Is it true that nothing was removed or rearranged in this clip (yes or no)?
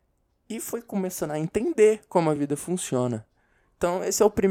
yes